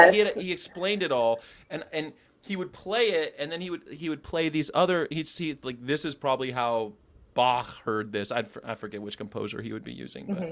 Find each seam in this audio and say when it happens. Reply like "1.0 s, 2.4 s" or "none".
none